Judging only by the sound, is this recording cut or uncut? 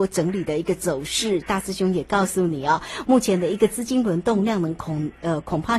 uncut